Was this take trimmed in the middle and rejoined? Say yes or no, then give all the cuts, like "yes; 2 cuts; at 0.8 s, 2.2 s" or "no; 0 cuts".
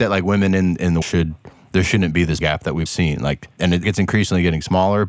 yes; 4 cuts; at 1.0 s, 2.4 s, 2.9 s, 3.8 s